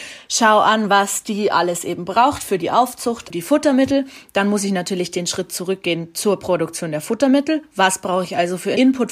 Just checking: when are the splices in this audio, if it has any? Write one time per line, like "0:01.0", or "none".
0:03.3